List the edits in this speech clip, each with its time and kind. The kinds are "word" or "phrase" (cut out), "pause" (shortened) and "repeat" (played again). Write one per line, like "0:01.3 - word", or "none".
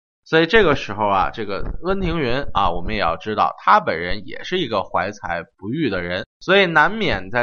0:06.3 - pause